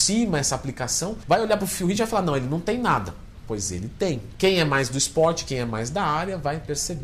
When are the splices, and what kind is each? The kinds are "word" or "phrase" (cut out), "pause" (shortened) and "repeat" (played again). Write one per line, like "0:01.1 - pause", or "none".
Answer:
none